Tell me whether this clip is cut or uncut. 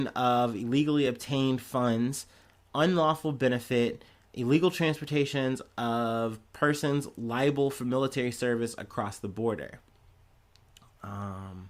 uncut